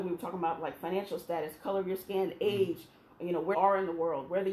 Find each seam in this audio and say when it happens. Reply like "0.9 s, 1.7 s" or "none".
3.5 s